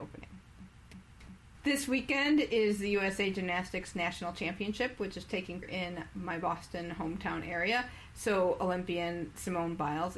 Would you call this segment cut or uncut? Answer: cut